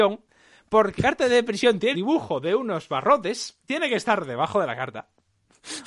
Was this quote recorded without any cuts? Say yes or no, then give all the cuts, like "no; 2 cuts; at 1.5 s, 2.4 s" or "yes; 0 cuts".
no; 3 cuts; at 1.0 s, 1.9 s, 3.7 s